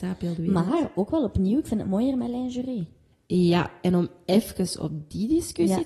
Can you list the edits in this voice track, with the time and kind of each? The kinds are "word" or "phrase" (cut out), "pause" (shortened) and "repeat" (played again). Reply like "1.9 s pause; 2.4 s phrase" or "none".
3.1 s pause